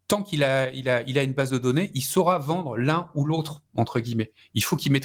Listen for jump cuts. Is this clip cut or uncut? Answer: cut